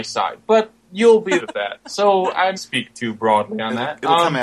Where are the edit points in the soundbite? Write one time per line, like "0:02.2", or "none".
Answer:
0:01.4
0:02.6